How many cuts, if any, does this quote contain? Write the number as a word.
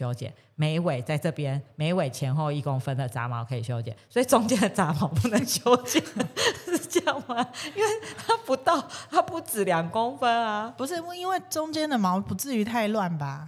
zero